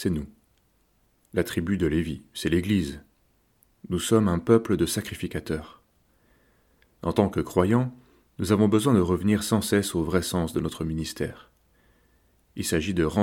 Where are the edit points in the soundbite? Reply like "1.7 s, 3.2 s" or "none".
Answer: none